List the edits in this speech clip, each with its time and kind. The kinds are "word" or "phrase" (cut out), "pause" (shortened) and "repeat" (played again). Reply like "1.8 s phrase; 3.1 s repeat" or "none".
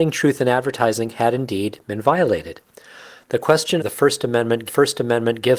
3.8 s phrase; 4.7 s repeat